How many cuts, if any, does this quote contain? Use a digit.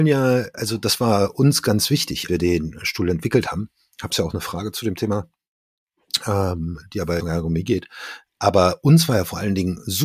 3